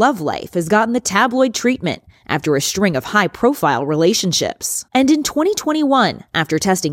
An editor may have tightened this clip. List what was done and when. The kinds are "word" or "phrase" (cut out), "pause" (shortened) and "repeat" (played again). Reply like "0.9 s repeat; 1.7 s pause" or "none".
4.9 s pause